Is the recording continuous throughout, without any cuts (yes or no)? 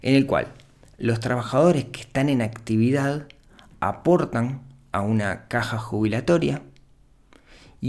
yes